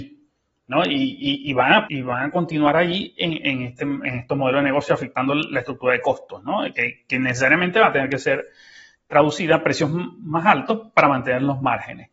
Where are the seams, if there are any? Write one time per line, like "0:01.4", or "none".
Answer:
0:01.9

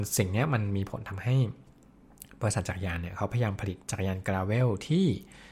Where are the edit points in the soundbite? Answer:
0:03.8

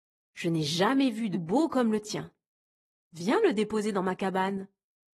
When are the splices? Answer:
0:01.3

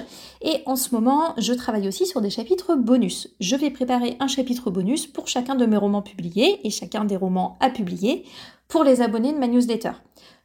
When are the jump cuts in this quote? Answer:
none

